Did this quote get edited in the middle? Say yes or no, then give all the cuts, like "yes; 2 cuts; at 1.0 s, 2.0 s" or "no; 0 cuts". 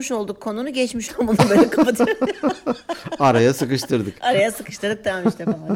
yes; 1 cut; at 1.1 s